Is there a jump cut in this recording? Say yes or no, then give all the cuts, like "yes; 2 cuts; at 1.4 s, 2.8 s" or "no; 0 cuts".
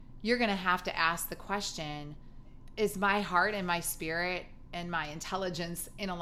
no; 0 cuts